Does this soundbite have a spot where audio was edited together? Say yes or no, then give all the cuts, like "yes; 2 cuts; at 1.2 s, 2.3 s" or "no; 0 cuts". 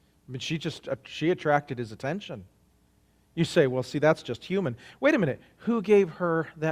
no; 0 cuts